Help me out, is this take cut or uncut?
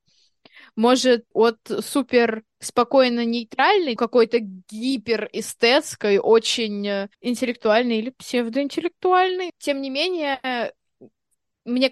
cut